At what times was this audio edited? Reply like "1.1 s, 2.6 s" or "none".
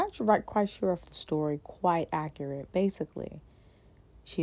1.0 s, 2.7 s